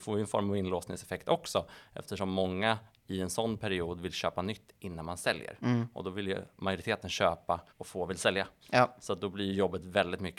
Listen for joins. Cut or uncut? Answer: cut